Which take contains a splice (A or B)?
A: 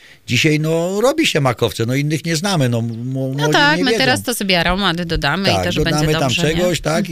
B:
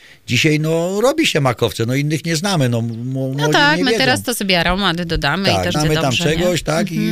B